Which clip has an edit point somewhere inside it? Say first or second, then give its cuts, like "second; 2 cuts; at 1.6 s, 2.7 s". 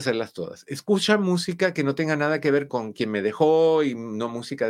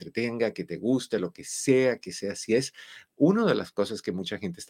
first; 1 cut; at 2.7 s